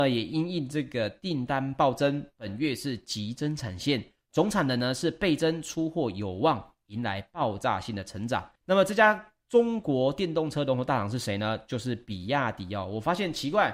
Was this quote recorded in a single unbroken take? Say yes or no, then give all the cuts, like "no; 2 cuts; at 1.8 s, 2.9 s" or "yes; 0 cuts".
no; 1 cut; at 8.6 s